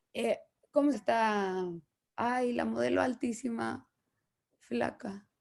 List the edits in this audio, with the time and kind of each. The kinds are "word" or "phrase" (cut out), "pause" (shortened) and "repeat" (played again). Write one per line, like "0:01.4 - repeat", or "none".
0:00.9 - word